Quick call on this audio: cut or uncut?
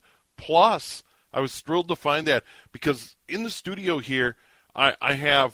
uncut